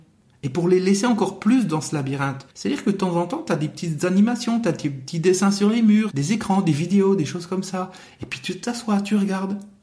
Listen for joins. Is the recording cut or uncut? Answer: cut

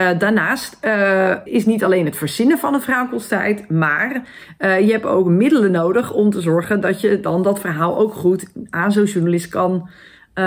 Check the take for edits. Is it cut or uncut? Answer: cut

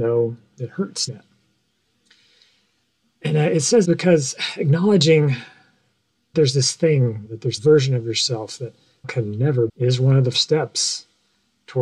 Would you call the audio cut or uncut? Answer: cut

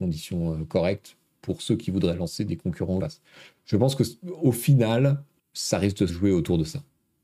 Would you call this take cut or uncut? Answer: cut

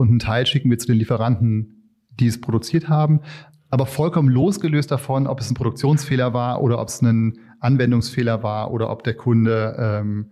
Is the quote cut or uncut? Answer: uncut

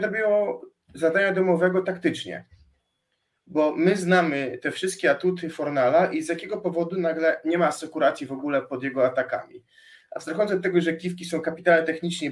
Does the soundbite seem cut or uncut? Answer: uncut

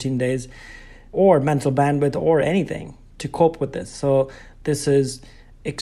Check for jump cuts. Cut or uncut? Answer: uncut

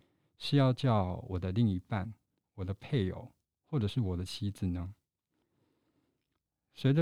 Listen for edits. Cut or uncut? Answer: uncut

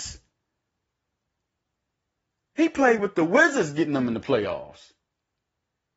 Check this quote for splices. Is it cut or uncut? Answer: uncut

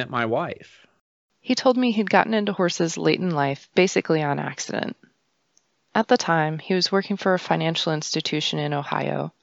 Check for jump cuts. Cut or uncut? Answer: uncut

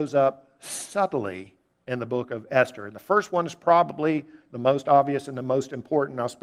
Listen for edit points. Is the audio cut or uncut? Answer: uncut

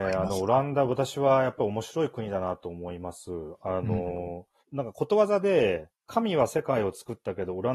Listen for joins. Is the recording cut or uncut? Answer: cut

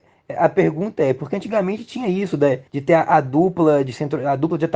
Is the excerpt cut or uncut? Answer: cut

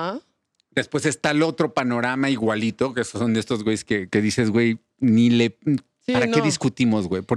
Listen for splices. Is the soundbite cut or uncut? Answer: uncut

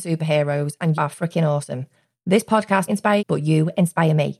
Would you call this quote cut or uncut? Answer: cut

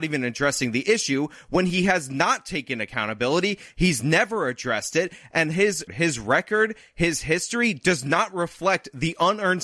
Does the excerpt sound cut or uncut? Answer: cut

